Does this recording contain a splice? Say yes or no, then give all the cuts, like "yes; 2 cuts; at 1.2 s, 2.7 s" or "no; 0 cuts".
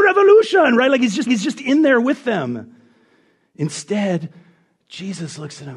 yes; 1 cut; at 1.3 s